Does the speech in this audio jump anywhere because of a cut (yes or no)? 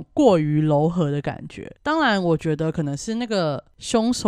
yes